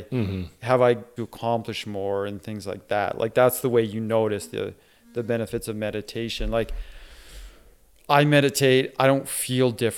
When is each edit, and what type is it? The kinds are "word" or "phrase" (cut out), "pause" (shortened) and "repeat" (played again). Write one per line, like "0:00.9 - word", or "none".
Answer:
0:01.2 - phrase